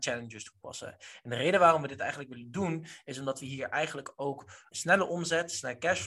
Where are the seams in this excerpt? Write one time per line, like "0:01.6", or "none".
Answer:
0:04.7

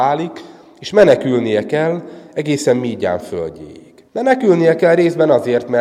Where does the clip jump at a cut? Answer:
0:04.1

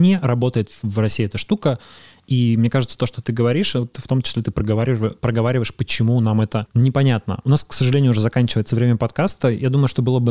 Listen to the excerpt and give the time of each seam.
none

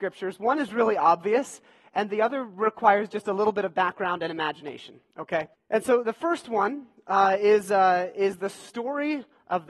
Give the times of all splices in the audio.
0:05.5
0:06.0

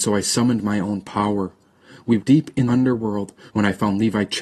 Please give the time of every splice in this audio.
0:02.2
0:02.7

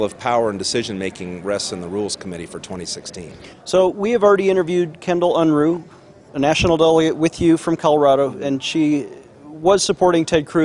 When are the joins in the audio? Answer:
none

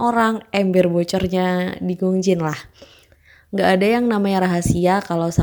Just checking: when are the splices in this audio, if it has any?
none

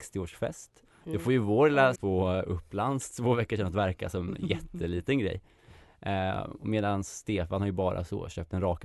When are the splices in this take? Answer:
0:02.0

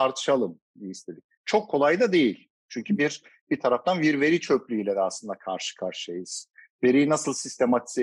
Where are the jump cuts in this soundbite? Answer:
none

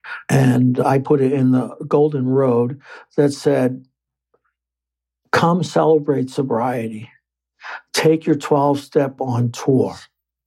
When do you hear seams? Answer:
0:09.2

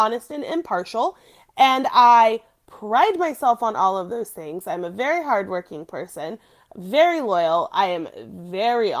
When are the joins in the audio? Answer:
none

